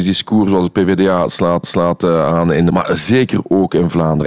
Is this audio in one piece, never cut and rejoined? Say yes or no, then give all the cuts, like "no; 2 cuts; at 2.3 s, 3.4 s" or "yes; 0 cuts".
no; 2 cuts; at 1.6 s, 2.7 s